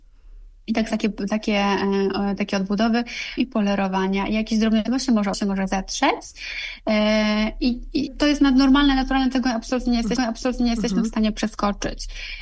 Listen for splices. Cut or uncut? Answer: cut